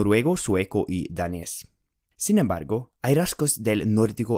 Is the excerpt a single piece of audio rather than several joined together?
yes; 0 cuts

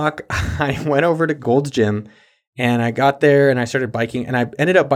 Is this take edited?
no; 0 cuts

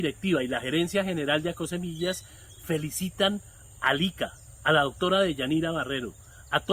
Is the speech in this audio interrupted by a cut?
no; 0 cuts

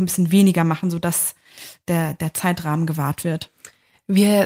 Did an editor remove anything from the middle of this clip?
no; 0 cuts

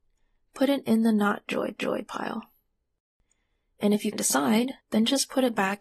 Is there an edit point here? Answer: yes; 3 cuts; at 1.8 s, 4.1 s, 4.8 s

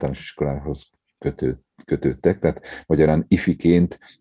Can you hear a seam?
no; 0 cuts

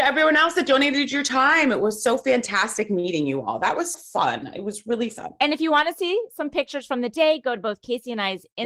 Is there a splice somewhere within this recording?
yes; 1 cut; at 3.9 s

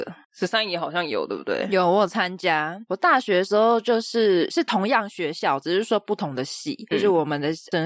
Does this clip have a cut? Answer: yes; 1 cut; at 6.9 s

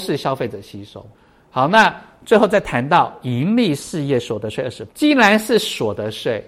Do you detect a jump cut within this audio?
yes; 2 cuts; at 1.1 s, 4.9 s

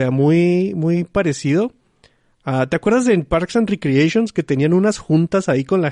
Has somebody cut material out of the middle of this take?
no; 0 cuts

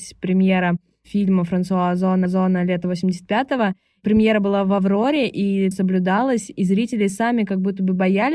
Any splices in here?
yes; 2 cuts; at 2.3 s, 5.7 s

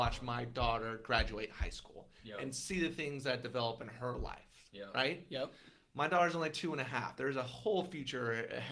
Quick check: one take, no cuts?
yes; 0 cuts

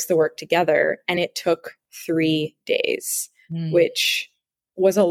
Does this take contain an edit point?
no; 0 cuts

